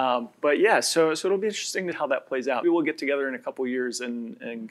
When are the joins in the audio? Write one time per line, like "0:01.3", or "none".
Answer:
0:01.9
0:02.6